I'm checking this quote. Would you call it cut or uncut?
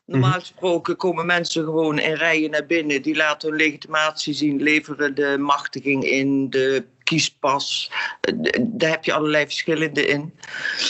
uncut